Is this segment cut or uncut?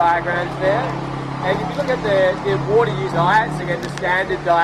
cut